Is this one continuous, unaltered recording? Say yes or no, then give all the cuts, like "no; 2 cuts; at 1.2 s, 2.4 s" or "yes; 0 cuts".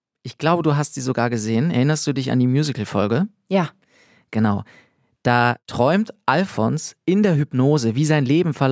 yes; 0 cuts